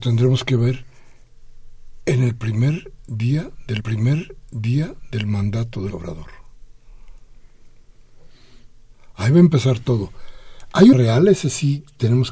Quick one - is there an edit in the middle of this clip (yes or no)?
yes